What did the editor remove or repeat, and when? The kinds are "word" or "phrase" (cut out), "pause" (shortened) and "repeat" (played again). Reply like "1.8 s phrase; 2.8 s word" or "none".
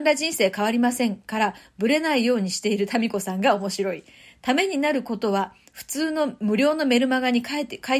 none